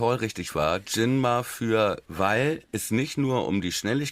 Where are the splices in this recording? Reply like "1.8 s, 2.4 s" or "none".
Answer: 2.0 s, 2.7 s